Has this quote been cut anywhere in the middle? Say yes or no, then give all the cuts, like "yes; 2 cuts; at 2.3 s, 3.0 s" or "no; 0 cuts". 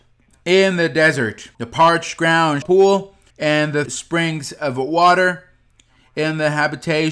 yes; 4 cuts; at 1.5 s, 2.6 s, 3.3 s, 3.9 s